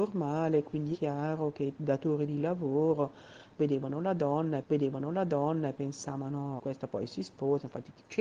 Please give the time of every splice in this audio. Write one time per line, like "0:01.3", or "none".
0:00.9
0:04.6
0:06.6